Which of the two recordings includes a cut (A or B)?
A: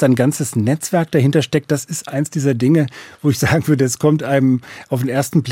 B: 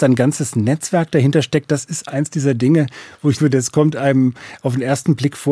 B